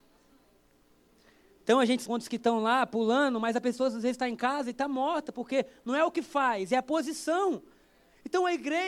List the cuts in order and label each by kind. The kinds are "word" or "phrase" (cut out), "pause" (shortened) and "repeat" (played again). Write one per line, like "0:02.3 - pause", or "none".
0:02.0 - word